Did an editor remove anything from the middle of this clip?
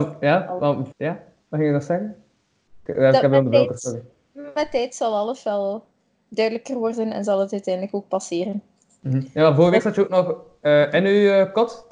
yes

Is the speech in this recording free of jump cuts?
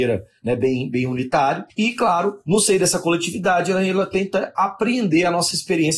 no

